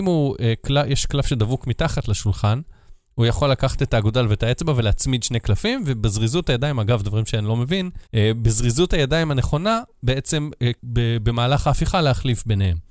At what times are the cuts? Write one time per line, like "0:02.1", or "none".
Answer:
0:08.1
0:10.8

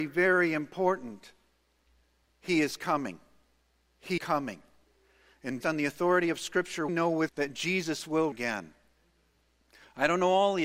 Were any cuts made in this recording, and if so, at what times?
0:04.2
0:05.6
0:06.9
0:07.3
0:08.3

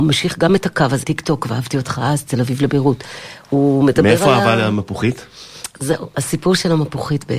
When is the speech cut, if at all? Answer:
0:01.0
0:05.7

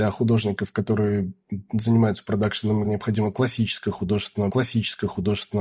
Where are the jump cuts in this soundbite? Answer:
0:02.8
0:04.5

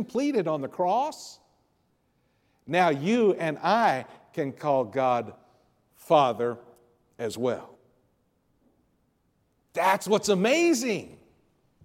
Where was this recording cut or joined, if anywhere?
none

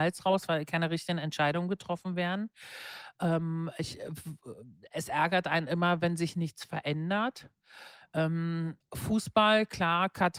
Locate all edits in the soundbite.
none

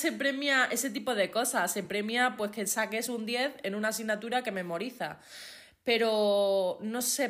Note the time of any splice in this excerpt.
none

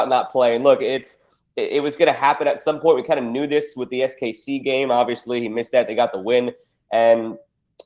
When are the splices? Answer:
none

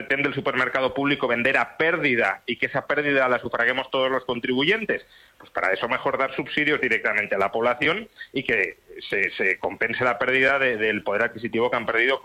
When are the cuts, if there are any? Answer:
none

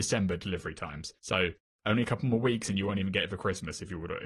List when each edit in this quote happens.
0:01.2

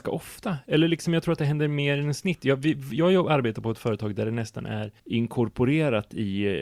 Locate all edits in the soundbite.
0:05.0

